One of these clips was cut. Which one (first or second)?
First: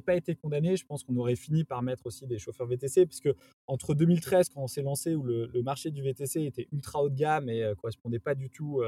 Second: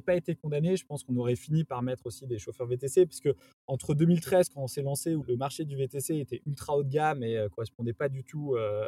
second